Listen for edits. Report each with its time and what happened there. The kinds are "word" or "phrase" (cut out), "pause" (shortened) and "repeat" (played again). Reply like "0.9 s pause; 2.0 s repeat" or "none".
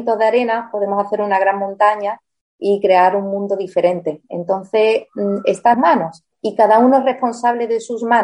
5.7 s word